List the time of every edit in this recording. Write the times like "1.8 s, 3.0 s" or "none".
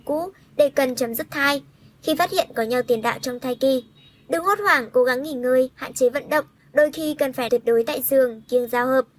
7.5 s